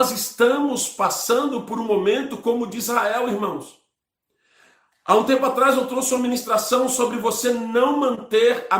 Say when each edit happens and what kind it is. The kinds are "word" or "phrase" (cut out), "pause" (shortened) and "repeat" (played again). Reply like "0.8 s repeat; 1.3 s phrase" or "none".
none

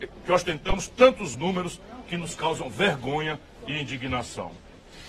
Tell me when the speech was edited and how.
1.3 s word

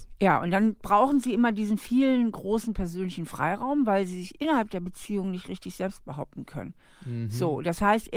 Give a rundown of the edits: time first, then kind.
none

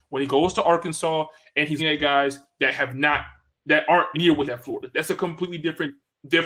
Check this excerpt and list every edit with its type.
1.8 s word; 4.1 s word; 4.5 s phrase

